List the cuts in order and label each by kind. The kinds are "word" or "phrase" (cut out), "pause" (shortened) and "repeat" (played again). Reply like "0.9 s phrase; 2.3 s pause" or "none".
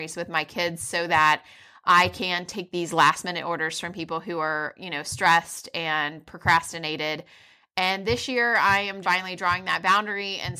9.0 s word